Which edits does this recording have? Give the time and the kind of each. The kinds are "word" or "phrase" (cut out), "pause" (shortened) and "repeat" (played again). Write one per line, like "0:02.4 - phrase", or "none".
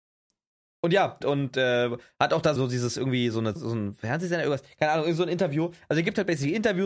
0:01.2 - word
0:02.6 - word
0:03.6 - word